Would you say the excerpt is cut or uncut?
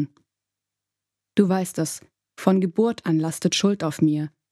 uncut